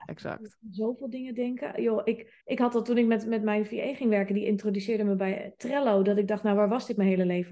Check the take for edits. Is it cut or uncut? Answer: cut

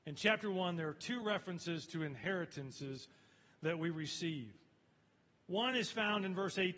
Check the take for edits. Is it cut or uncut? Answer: uncut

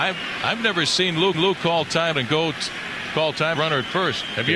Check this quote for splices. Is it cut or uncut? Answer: cut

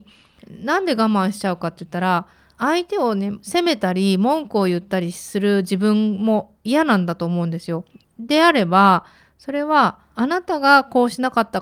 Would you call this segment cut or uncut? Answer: uncut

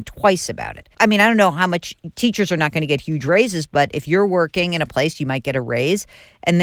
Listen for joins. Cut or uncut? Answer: cut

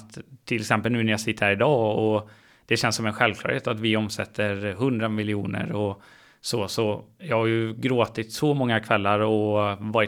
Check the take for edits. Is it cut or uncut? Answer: uncut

